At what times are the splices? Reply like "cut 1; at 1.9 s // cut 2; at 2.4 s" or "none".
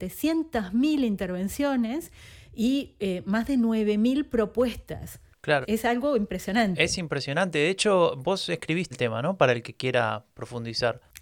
cut 1; at 5.6 s // cut 2; at 8.9 s